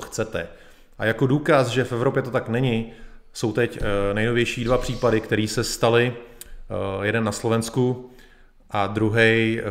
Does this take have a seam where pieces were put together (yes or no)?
no